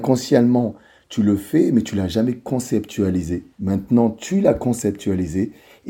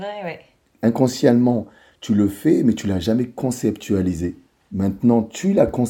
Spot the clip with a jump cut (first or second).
first